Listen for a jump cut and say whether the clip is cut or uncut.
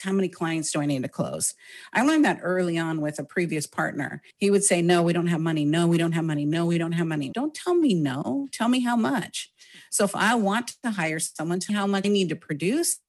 cut